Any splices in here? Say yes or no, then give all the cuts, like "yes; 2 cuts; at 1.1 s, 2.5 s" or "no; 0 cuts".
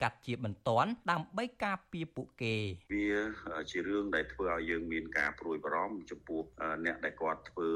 yes; 1 cut; at 1.0 s